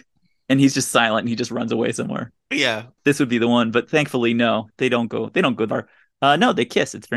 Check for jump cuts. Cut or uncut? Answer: cut